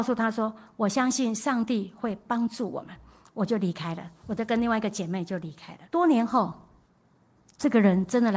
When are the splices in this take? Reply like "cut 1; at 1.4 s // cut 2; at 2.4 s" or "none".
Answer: cut 1; at 5.9 s